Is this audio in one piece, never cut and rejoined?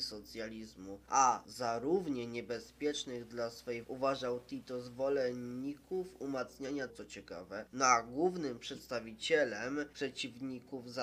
no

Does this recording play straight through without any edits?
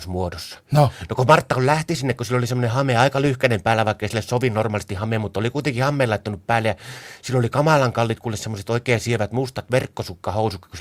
yes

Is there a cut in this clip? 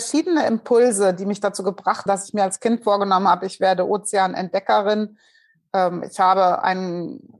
yes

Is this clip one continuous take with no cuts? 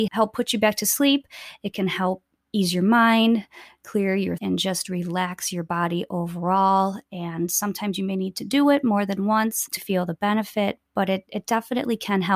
no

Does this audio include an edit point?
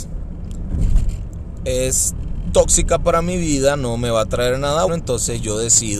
yes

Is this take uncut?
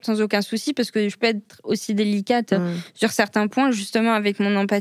yes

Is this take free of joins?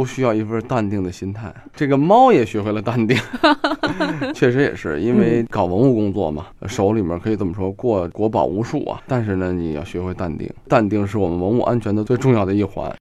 no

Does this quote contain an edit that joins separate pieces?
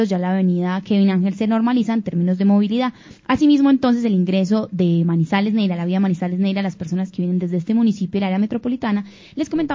yes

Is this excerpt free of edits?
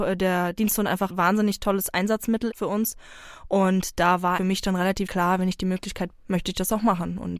no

